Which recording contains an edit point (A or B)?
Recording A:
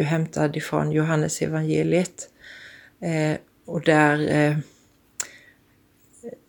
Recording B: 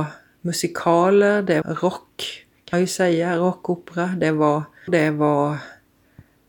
B